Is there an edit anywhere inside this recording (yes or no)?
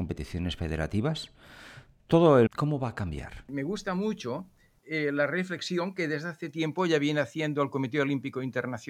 yes